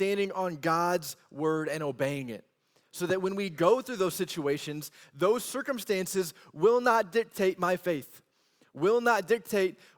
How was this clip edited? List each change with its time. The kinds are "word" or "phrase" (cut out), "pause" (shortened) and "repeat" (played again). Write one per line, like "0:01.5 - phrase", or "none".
none